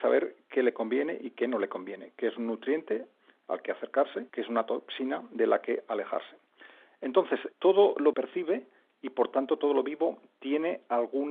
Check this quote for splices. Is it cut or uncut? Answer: cut